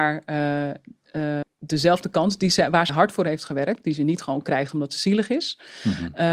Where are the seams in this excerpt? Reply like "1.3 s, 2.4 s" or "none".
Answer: 1.4 s, 2.9 s